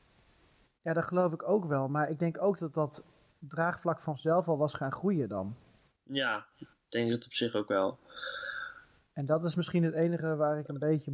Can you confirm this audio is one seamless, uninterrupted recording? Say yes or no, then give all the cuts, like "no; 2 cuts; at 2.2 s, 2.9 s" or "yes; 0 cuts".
yes; 0 cuts